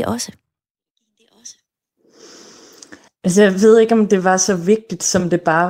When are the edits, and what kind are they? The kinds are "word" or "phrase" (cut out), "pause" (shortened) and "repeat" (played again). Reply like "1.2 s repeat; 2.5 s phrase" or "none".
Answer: 3.1 s pause